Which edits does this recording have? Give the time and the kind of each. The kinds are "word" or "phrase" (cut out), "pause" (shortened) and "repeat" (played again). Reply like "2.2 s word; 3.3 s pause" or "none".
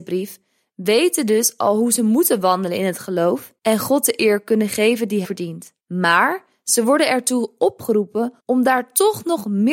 3.6 s pause; 5.2 s word; 5.8 s pause; 8.4 s pause